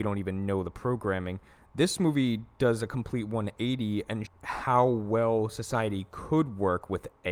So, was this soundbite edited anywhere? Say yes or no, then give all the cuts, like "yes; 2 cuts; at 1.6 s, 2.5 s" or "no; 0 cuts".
yes; 1 cut; at 4.3 s